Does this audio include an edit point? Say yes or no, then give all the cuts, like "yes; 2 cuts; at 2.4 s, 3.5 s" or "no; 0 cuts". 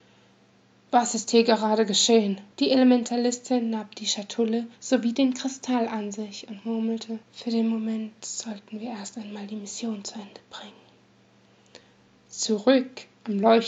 yes; 3 cuts; at 2.5 s, 4.7 s, 7.2 s